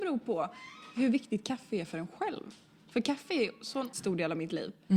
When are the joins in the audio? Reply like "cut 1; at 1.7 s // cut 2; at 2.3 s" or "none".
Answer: cut 1; at 3.9 s